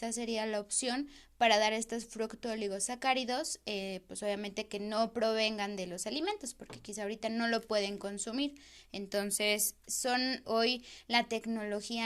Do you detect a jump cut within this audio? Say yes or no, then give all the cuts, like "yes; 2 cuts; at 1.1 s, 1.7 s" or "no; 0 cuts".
yes; 1 cut; at 10.4 s